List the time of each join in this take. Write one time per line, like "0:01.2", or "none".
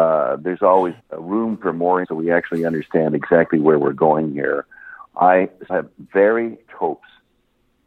0:01.0
0:02.0
0:05.7
0:06.7